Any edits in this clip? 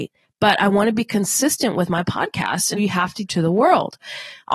yes; 2 cuts; at 2.8 s, 3.3 s

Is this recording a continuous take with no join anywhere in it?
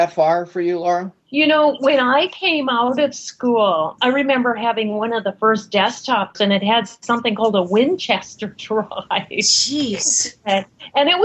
no; 3 cuts; at 1.2 s, 4.0 s, 6.3 s

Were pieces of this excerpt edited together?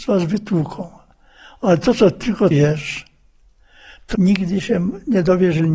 yes; 2 cuts; at 2.5 s, 4.1 s

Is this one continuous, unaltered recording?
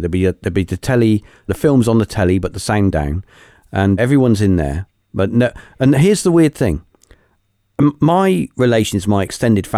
no; 3 cuts; at 1.5 s, 2.9 s, 4.0 s

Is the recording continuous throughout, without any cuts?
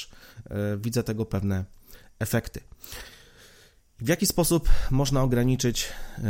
yes; 0 cuts

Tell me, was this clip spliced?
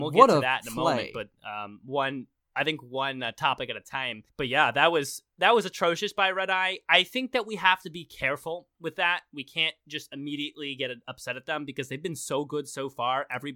yes; 1 cut; at 4.3 s

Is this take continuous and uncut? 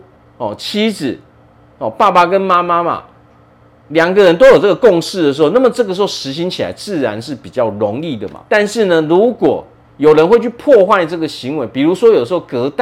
no; 2 cuts; at 8.5 s, 9.8 s

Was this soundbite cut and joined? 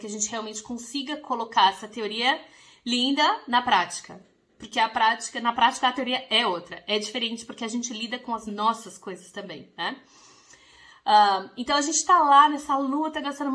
no; 0 cuts

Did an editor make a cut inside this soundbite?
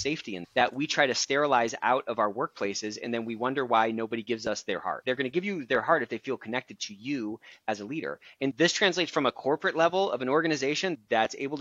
no; 0 cuts

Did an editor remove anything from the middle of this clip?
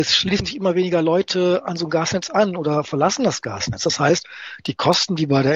no; 0 cuts

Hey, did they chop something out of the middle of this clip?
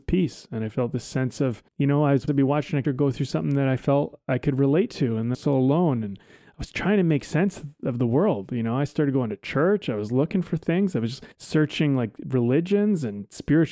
yes; 5 cuts; at 1.7 s, 2.3 s, 2.8 s, 5.3 s, 11.3 s

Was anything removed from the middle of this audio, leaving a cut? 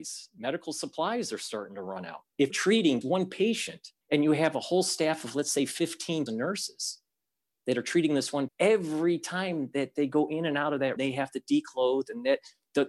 yes; 6 cuts; at 2.5 s, 3.0 s, 4.0 s, 6.3 s, 8.5 s, 11.0 s

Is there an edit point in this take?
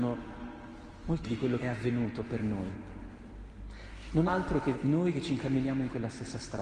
yes; 4 cuts; at 1.2 s, 1.6 s, 4.3 s, 4.7 s

